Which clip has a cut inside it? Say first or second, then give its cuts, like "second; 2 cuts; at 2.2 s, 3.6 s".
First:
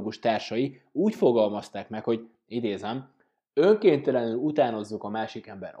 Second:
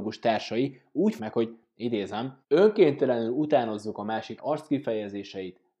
second; 3 cuts; at 1.2 s, 2.4 s, 4.4 s